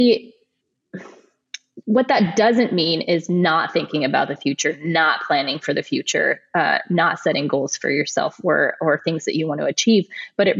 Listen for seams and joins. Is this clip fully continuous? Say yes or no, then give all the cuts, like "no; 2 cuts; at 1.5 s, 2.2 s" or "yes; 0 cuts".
yes; 0 cuts